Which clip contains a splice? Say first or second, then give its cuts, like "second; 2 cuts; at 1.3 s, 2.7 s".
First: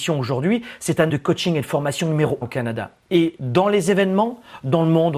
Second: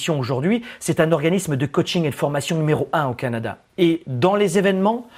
first; 2 cuts; at 1.1 s, 2.4 s